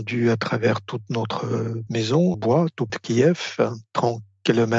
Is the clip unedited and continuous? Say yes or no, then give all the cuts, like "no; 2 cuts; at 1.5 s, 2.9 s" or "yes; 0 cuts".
no; 3 cuts; at 1.9 s, 2.3 s, 2.9 s